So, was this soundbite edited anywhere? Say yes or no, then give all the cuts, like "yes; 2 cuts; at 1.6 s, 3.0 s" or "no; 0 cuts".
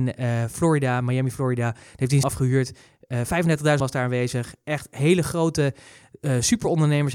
yes; 2 cuts; at 2.2 s, 3.8 s